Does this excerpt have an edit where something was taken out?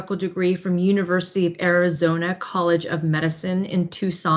no; 0 cuts

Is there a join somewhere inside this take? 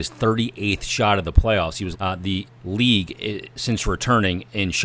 yes; 2 cuts; at 1.9 s, 2.5 s

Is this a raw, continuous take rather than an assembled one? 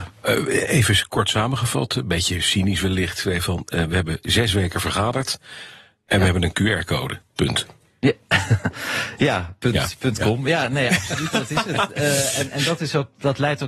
yes; 0 cuts

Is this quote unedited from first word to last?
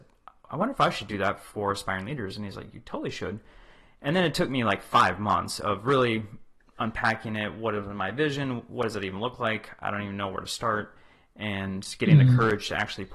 yes; 0 cuts

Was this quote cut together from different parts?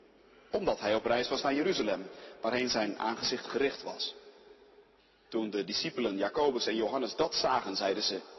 yes; 1 cut; at 5.0 s

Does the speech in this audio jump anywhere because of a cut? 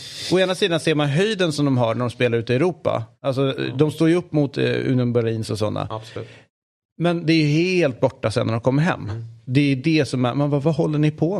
no; 0 cuts

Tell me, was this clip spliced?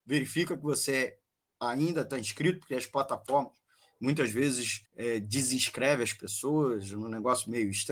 yes; 1 cut; at 4.9 s

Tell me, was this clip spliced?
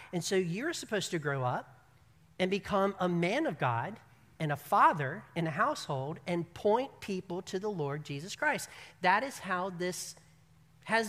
no; 0 cuts

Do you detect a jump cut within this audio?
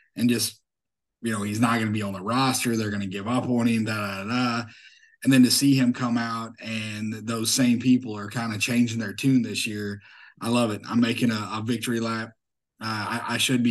no; 0 cuts

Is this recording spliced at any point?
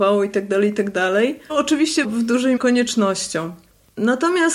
yes; 3 cuts; at 1.5 s, 2.0 s, 2.6 s

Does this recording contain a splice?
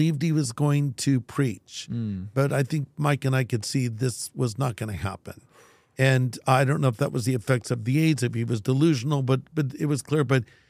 no; 0 cuts

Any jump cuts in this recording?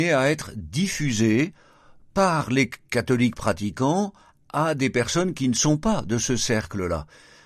no; 0 cuts

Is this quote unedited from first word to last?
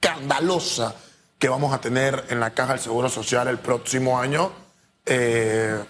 yes; 0 cuts

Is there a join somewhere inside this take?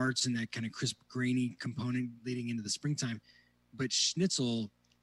no; 0 cuts

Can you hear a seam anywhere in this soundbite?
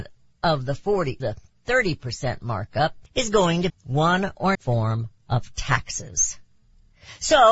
yes; 4 cuts; at 1.2 s, 3.1 s, 3.7 s, 4.5 s

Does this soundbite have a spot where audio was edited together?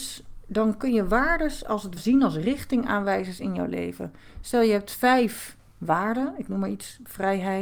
yes; 1 cut; at 2.0 s

